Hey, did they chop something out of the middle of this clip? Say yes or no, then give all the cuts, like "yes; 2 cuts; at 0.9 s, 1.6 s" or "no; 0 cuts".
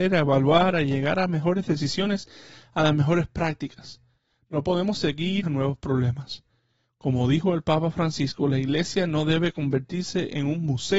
yes; 1 cut; at 5.4 s